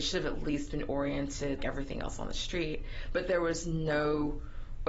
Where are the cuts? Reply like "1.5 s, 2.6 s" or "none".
1.6 s